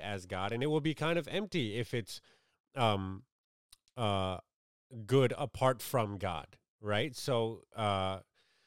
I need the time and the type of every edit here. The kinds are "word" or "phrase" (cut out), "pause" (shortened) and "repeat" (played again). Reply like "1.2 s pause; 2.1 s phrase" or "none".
none